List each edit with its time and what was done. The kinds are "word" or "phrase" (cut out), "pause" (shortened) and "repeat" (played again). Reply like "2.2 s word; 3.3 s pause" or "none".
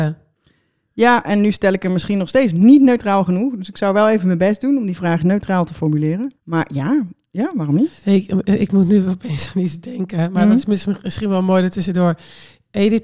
6.4 s pause